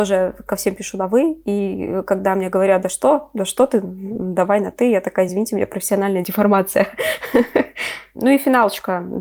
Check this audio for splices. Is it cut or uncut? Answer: uncut